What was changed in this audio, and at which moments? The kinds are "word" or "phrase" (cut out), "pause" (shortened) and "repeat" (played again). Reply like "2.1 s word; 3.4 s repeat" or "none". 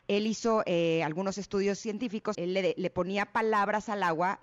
2.3 s phrase